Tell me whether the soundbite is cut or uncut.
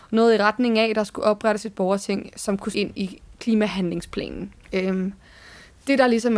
cut